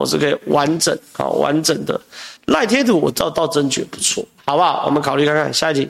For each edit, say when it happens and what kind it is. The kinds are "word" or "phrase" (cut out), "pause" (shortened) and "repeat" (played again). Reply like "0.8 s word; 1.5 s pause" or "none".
2.4 s pause